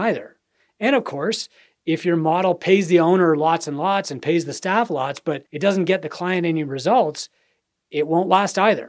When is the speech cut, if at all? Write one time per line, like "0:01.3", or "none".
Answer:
0:05.5